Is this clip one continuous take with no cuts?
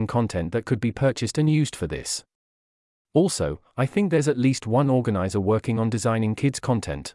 yes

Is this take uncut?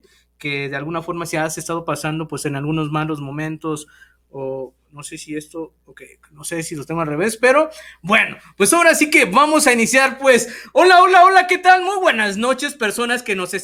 yes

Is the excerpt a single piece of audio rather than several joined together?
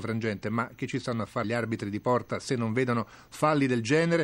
no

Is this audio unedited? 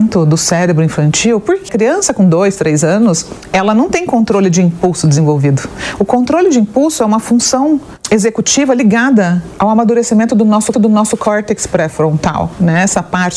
no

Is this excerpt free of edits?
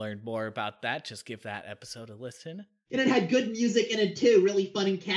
yes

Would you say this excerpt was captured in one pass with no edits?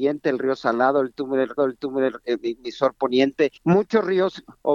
no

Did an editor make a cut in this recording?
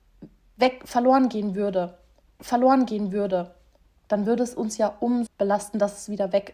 yes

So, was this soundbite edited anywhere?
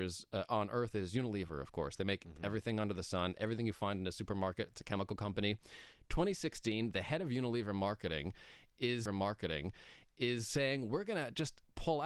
yes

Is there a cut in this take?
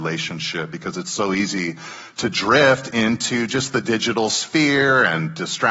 no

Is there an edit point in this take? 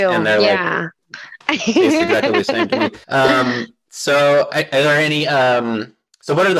yes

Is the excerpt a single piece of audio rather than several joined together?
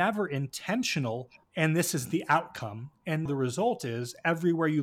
no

